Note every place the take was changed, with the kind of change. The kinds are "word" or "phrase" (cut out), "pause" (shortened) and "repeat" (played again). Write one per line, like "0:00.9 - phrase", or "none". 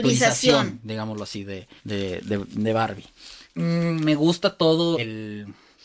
0:01.8 - pause
0:03.5 - pause
0:04.9 - word